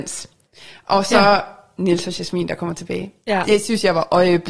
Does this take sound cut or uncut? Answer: uncut